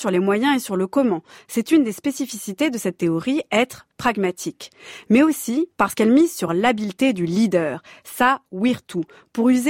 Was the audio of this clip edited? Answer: no; 0 cuts

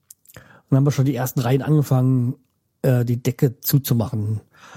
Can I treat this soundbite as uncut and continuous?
yes; 0 cuts

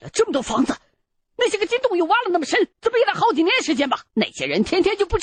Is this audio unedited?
no; 2 cuts; at 2.7 s, 4.1 s

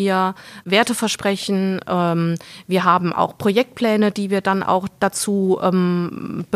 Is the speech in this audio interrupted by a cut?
no; 0 cuts

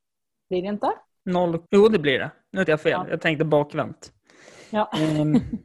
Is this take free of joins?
no; 2 cuts; at 1.7 s, 2.7 s

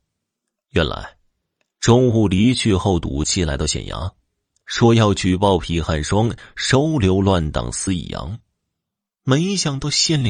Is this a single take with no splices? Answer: yes; 0 cuts

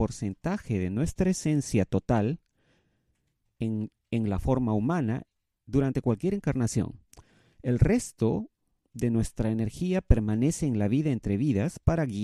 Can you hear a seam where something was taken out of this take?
no; 0 cuts

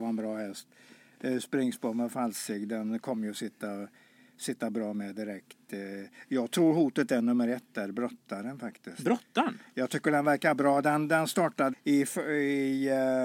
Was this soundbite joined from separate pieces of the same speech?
yes; 1 cut; at 11.7 s

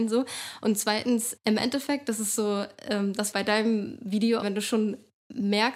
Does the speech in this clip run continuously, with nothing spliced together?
no; 3 cuts; at 1.4 s, 3.3 s, 4.4 s

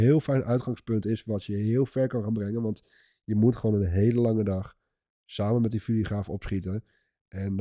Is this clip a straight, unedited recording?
yes; 0 cuts

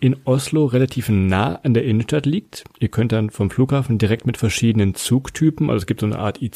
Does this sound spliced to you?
no; 0 cuts

